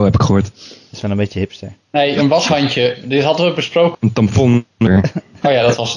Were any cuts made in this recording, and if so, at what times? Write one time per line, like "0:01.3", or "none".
0:03.9